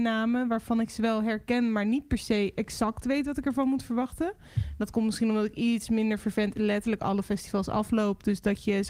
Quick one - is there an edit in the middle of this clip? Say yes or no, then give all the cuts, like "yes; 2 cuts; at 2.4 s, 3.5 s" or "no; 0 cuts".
no; 0 cuts